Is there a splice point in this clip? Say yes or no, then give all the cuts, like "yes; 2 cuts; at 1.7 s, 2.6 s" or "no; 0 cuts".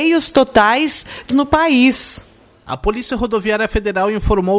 yes; 1 cut; at 1.3 s